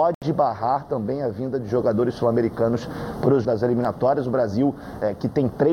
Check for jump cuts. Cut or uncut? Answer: cut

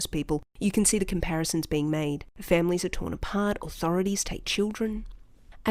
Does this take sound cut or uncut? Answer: uncut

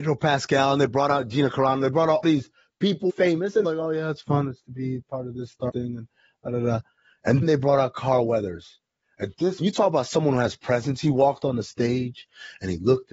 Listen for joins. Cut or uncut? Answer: cut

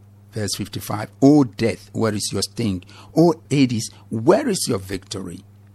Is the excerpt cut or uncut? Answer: uncut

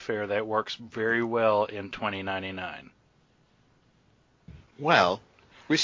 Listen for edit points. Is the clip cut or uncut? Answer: uncut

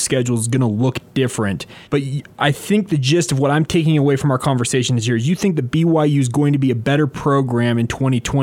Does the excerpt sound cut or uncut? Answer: cut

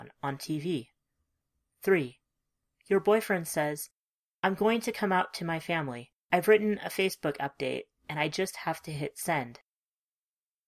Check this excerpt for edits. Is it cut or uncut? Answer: uncut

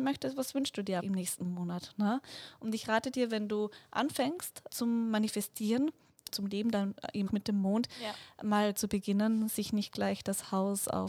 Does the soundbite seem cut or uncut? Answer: cut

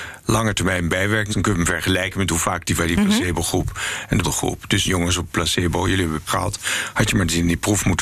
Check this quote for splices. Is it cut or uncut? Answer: cut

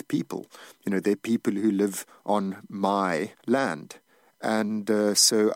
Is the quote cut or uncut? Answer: cut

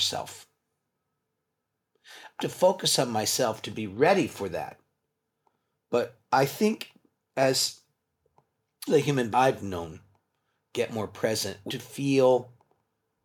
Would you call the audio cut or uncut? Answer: cut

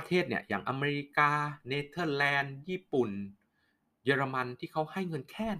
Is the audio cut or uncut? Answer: uncut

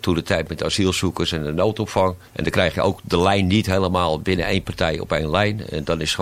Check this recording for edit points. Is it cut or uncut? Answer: cut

